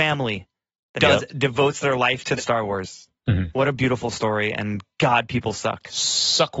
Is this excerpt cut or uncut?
cut